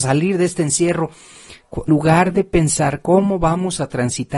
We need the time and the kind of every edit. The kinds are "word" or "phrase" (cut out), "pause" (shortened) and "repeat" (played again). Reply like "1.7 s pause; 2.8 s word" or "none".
1.9 s word